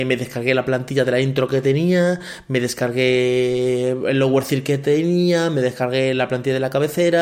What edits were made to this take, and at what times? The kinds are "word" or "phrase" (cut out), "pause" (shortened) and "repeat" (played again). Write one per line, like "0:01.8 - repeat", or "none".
none